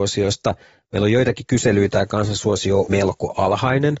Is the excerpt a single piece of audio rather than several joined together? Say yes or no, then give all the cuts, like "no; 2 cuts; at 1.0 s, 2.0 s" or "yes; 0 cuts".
no; 2 cuts; at 1.9 s, 2.9 s